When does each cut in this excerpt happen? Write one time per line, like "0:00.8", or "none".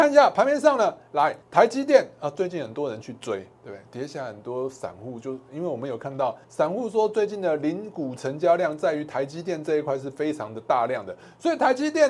0:01.4
0:03.5
0:06.4